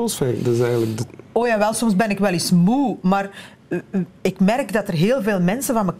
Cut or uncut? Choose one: uncut